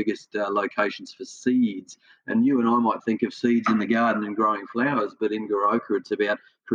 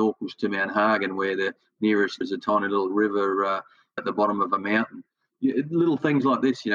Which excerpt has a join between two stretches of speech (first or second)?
second